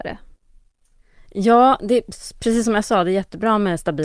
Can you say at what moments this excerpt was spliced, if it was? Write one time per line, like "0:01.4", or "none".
none